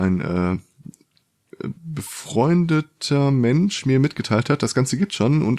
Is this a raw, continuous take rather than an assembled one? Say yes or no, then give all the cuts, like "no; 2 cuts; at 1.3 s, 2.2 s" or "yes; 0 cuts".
yes; 0 cuts